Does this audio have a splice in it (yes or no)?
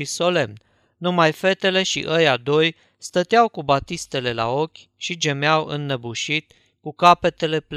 no